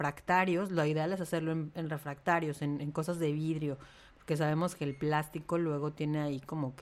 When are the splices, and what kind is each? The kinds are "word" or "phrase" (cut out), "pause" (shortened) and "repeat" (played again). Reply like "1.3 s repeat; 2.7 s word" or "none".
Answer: none